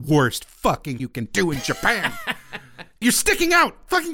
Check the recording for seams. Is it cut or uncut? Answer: cut